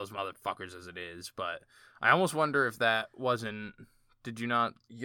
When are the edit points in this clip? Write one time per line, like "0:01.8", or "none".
none